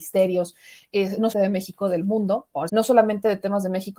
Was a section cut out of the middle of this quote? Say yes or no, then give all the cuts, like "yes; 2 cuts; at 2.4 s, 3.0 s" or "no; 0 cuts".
yes; 2 cuts; at 1.3 s, 2.7 s